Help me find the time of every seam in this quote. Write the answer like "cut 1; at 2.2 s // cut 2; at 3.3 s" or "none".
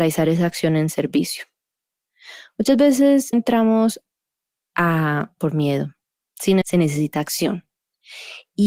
cut 1; at 3.3 s // cut 2; at 5.4 s // cut 3; at 6.6 s